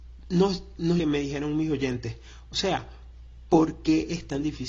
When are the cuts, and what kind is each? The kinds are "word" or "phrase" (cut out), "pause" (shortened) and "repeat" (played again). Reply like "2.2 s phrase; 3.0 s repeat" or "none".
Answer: 1.0 s phrase